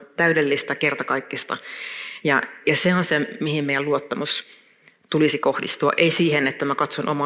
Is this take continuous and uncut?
yes; 0 cuts

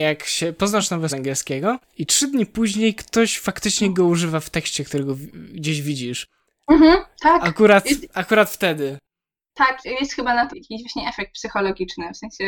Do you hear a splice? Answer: yes; 3 cuts; at 1.1 s, 9.8 s, 10.5 s

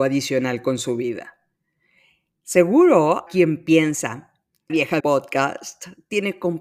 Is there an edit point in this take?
yes; 3 cuts; at 3.3 s, 4.7 s, 5.0 s

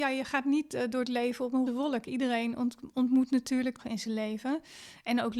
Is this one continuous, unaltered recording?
no; 2 cuts; at 1.7 s, 3.8 s

